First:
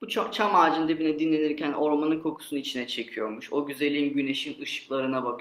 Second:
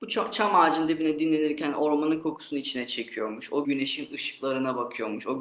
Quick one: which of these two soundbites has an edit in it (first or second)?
second